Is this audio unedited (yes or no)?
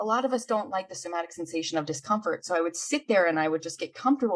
yes